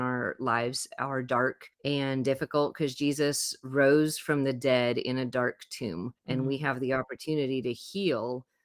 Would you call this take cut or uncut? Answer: cut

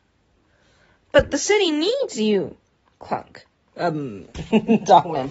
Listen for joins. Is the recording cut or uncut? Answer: uncut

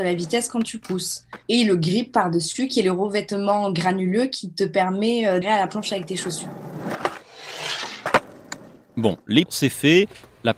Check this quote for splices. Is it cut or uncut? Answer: cut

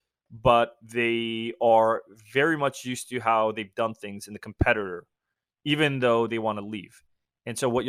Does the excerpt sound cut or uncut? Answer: uncut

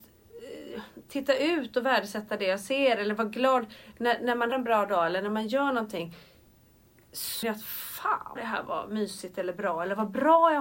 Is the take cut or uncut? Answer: cut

